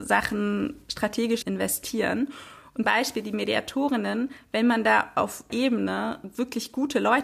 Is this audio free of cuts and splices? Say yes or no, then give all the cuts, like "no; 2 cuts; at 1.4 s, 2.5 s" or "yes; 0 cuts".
no; 3 cuts; at 1.4 s, 2.8 s, 5.5 s